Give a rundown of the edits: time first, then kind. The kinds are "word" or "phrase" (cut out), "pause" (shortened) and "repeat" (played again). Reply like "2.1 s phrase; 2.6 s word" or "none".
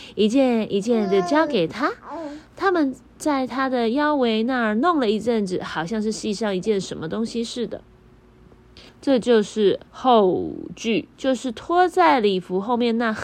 8.9 s pause; 9.9 s pause; 11.1 s pause